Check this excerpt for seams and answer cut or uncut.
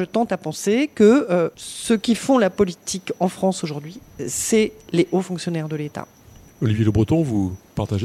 uncut